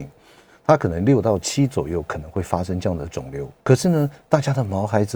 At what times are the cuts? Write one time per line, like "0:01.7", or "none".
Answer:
0:03.6